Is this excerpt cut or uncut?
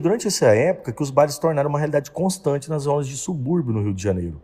uncut